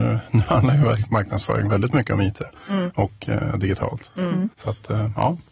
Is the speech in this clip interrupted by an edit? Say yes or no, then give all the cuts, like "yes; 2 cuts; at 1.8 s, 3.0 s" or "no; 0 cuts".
yes; 1 cut; at 4.5 s